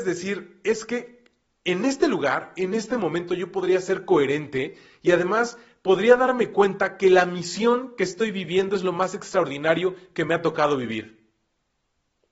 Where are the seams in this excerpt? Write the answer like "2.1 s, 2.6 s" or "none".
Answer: none